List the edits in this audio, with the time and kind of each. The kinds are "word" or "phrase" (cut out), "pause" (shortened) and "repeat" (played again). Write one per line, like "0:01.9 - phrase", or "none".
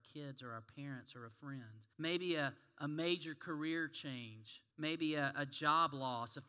0:01.9 - pause
0:04.7 - pause